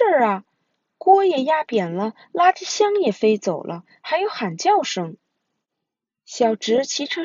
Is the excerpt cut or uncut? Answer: uncut